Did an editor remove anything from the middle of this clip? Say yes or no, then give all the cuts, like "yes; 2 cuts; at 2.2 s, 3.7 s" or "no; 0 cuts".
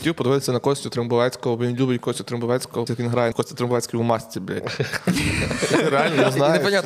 yes; 2 cuts; at 2.9 s, 3.3 s